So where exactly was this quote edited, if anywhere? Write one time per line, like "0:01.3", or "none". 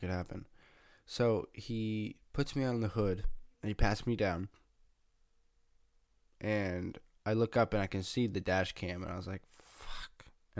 0:03.5